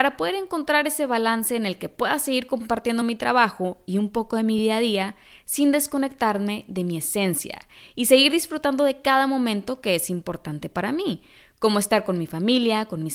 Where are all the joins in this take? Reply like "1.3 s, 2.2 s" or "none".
none